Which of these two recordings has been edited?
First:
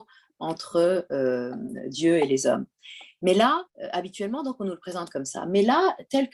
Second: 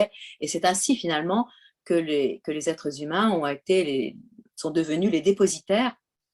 first; 1 cut; at 3.7 s

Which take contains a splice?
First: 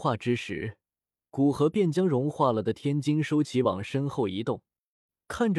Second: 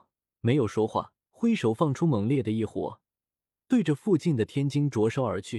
second; 1 cut; at 1.2 s

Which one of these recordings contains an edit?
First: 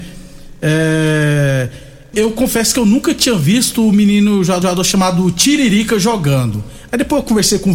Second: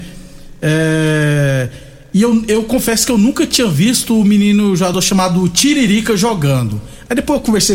first; 2 cuts; at 2.1 s, 4.6 s

